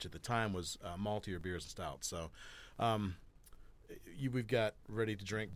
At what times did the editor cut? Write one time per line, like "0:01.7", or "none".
0:01.6